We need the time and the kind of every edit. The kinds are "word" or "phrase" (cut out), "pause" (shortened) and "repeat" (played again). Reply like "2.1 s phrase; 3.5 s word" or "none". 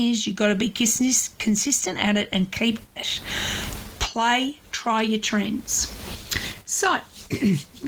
3.0 s word